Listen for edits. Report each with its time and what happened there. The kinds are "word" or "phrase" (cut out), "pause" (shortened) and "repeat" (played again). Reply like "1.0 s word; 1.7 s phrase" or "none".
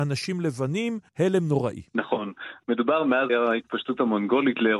1.1 s pause; 1.9 s pause; 3.3 s word